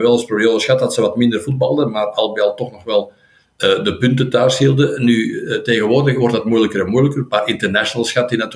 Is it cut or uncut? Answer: uncut